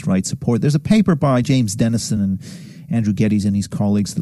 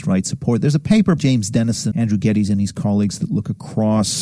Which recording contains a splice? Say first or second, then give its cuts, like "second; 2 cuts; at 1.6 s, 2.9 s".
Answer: second; 2 cuts; at 1.2 s, 1.9 s